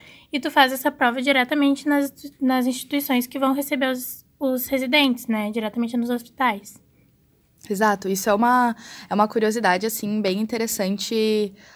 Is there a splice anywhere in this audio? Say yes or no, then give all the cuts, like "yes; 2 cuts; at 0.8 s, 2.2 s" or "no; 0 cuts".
no; 0 cuts